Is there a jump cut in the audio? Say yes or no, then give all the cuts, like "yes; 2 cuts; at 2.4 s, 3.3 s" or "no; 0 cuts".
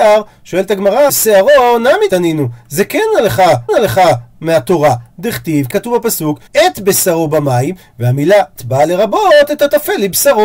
yes; 6 cuts; at 1.1 s, 2.1 s, 3.7 s, 5.7 s, 6.5 s, 8.6 s